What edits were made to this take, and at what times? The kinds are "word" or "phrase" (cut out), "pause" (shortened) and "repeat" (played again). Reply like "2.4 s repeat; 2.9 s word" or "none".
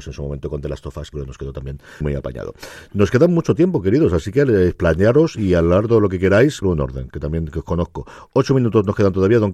1.1 s word; 2.0 s word; 6.6 s word